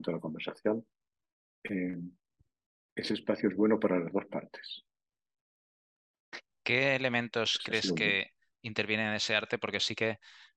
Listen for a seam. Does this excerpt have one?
no; 0 cuts

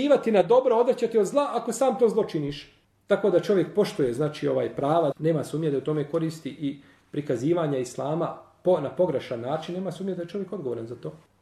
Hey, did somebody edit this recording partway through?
yes; 1 cut; at 5.1 s

